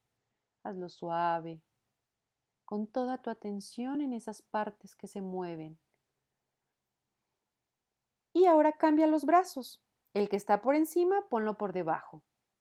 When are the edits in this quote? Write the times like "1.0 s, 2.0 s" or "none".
none